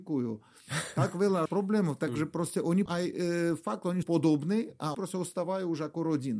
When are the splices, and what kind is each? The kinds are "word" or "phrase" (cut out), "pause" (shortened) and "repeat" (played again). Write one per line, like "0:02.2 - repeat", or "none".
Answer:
0:01.5 - phrase
0:02.9 - word
0:04.0 - word
0:04.9 - word